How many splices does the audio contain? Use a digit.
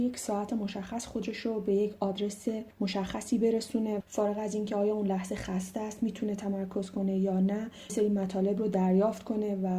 3